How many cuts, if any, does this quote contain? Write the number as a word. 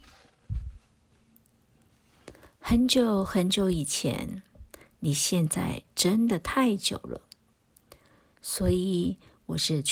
zero